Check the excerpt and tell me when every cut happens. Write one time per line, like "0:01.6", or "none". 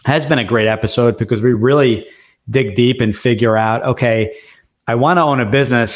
none